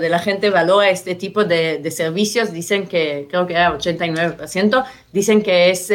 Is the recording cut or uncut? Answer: uncut